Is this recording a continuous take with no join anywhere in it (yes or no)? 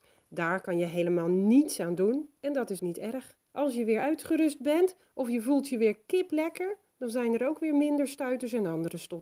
no